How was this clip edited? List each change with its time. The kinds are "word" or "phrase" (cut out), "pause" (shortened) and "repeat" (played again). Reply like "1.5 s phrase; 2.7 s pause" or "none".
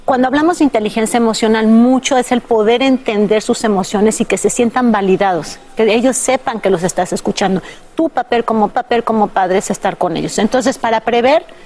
8.7 s repeat